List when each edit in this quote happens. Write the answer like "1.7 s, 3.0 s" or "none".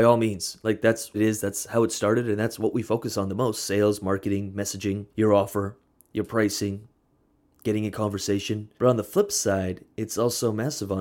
1.1 s, 5.1 s, 8.8 s